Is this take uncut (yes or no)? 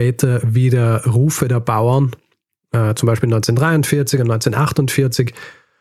yes